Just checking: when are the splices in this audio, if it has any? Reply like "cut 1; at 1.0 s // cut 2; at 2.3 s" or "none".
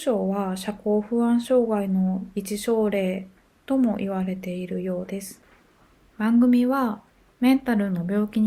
none

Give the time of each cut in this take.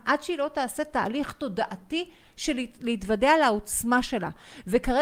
none

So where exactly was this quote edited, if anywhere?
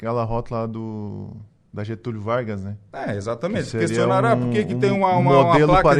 none

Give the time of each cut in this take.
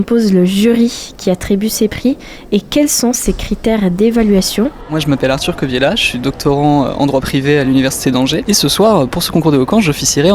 none

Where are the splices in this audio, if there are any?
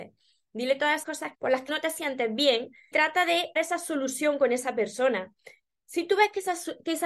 cut 1; at 1.0 s // cut 2; at 1.3 s // cut 3; at 1.7 s // cut 4; at 2.9 s // cut 5; at 3.6 s

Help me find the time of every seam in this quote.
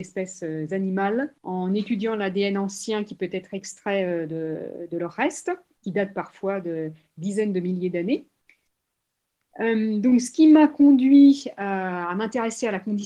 cut 1; at 1.4 s

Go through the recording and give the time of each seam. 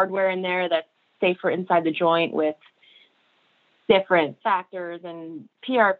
cut 1; at 1.2 s // cut 2; at 4.4 s

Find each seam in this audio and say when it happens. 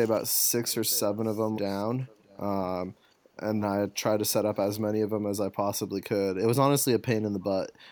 cut 1; at 1.6 s // cut 2; at 2.2 s // cut 3; at 3.6 s

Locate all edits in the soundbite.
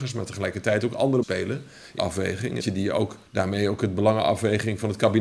cut 1; at 1.2 s // cut 2; at 2.0 s // cut 3; at 2.6 s // cut 4; at 3.3 s

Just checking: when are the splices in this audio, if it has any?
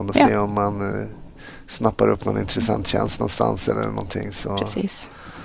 none

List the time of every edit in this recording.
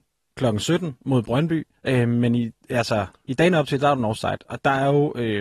cut 1; at 1.8 s

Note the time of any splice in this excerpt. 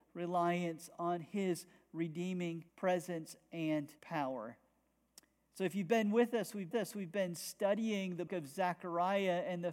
cut 1; at 2.7 s // cut 2; at 4.0 s // cut 3; at 6.7 s // cut 4; at 8.3 s

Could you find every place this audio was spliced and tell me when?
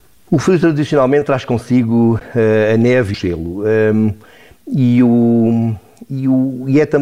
cut 1; at 3.1 s

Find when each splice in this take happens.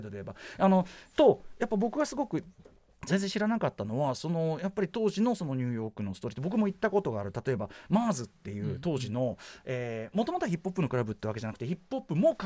none

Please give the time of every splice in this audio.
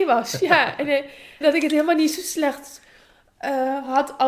cut 1; at 1.4 s

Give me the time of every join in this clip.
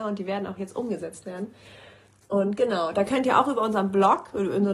none

